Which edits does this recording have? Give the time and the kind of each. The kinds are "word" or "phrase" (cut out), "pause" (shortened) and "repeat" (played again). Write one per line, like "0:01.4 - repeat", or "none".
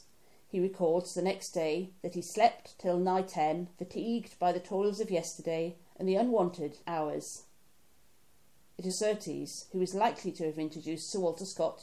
0:02.0 - pause
0:03.7 - pause
0:06.8 - word
0:08.9 - word